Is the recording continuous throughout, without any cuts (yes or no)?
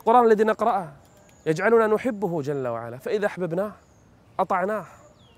yes